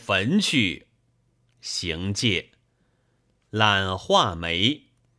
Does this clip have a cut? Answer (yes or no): no